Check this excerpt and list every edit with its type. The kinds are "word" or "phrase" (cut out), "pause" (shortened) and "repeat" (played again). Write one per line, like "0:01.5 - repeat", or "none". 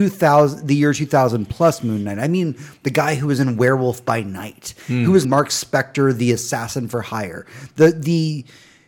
0:05.2 - word